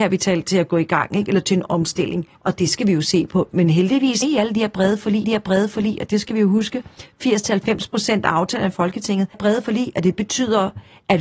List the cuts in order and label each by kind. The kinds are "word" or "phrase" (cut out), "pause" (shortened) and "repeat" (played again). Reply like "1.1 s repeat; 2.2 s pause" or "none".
2.3 s pause; 4.2 s phrase; 5.2 s repeat; 9.3 s word